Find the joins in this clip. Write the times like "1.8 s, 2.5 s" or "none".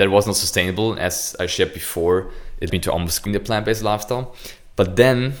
2.7 s, 3.3 s